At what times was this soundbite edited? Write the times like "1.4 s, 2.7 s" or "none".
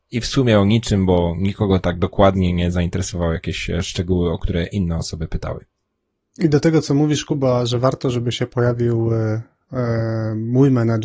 none